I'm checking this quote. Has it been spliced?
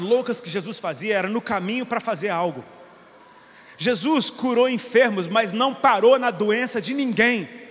no; 0 cuts

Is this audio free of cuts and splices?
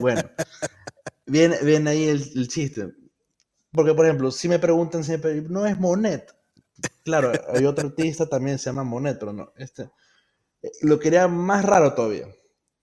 yes; 0 cuts

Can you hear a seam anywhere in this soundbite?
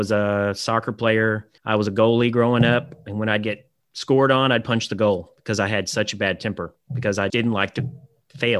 yes; 3 cuts; at 1.6 s, 3.8 s, 7.3 s

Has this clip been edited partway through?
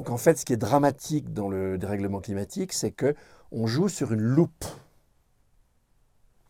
no; 0 cuts

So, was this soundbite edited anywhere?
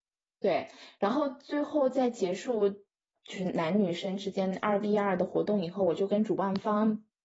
yes; 1 cut; at 3.2 s

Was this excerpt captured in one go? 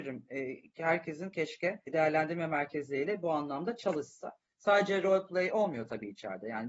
yes; 0 cuts

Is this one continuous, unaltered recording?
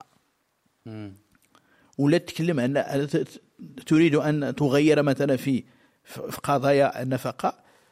yes; 0 cuts

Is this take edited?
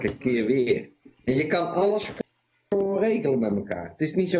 no; 0 cuts

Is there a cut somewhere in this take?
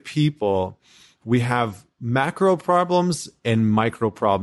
no; 0 cuts

